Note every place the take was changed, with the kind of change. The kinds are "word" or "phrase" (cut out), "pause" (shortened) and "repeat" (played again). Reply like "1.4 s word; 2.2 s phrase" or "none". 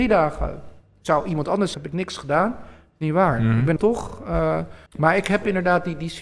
1.7 s word; 3.8 s word; 4.9 s pause